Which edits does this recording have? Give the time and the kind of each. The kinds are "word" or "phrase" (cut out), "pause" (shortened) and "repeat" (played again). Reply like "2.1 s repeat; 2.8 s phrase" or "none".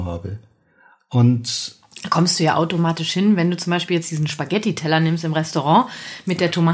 none

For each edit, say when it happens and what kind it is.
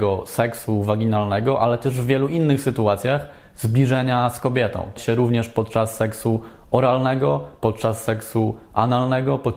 5.0 s phrase

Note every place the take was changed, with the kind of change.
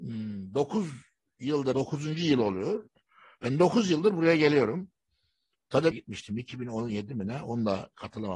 1.7 s phrase; 5.9 s phrase

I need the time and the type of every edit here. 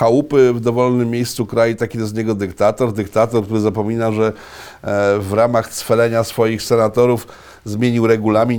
none

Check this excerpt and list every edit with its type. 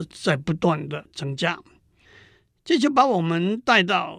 none

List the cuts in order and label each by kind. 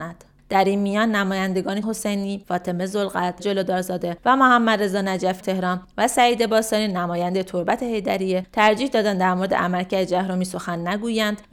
1.8 s phrase; 3.4 s word; 5.4 s word

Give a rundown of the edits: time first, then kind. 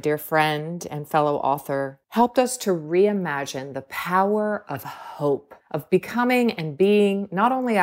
2.0 s pause; 5.6 s pause

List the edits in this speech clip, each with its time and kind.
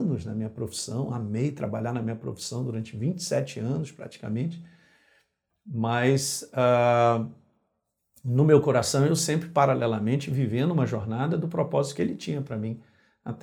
none

